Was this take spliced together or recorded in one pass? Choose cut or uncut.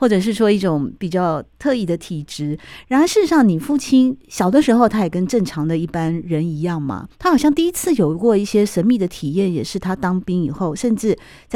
cut